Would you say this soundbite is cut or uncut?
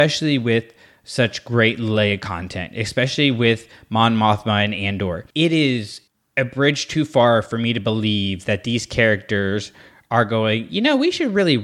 cut